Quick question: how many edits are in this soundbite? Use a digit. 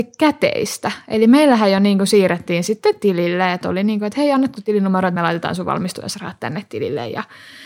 0